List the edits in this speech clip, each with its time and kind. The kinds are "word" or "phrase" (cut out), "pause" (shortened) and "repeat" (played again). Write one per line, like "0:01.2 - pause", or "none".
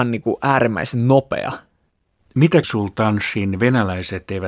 0:02.6 - word